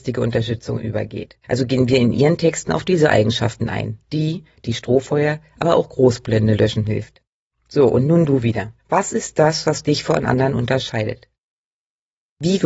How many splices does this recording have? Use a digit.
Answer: 4